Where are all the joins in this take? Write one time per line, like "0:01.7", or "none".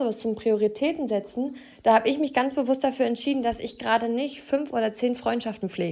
none